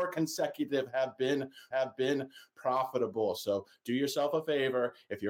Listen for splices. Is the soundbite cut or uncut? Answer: cut